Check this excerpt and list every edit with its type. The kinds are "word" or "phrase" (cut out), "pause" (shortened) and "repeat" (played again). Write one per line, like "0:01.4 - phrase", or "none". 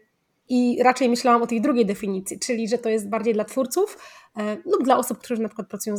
none